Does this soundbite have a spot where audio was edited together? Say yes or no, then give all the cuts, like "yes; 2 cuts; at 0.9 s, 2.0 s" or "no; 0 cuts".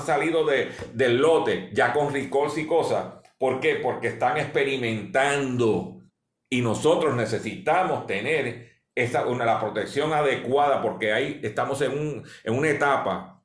yes; 1 cut; at 6.1 s